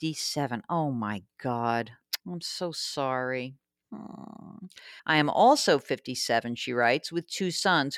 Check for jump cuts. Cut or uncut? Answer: cut